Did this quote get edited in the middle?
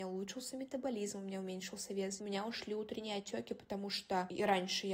no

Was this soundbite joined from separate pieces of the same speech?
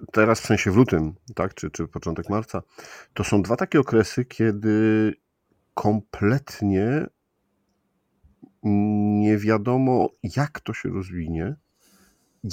no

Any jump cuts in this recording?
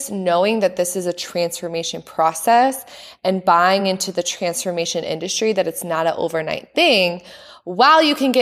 no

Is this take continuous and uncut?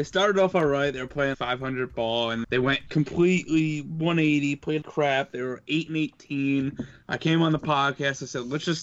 no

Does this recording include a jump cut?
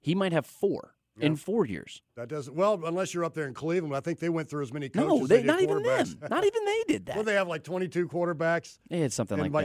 yes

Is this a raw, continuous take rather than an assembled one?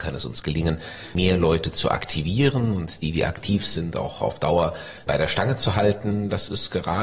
no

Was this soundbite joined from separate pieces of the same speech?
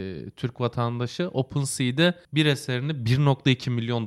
yes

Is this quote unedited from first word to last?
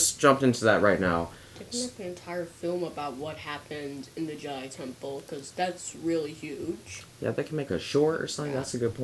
no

